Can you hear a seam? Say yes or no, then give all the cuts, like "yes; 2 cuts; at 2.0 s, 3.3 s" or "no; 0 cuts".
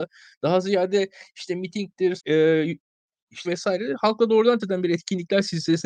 yes; 3 cuts; at 2.2 s, 3.4 s, 4.6 s